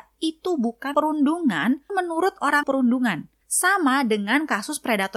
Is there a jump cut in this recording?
yes; 4 cuts; at 0.9 s, 1.9 s, 2.6 s, 3.4 s

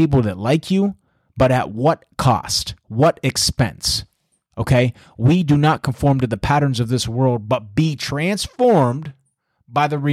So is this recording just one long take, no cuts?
yes; 0 cuts

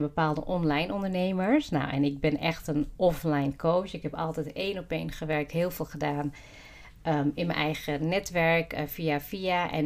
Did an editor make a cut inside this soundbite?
no; 0 cuts

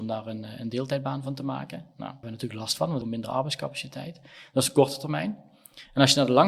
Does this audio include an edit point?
yes; 2 cuts; at 2.2 s, 3.0 s

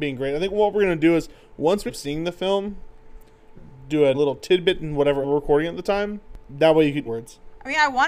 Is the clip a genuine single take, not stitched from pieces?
no; 5 cuts; at 1.9 s, 3.6 s, 4.1 s, 5.2 s, 7.1 s

